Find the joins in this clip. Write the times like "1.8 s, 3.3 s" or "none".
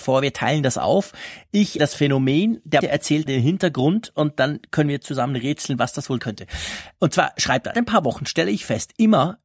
1.8 s, 2.8 s, 3.3 s, 6.2 s, 7.7 s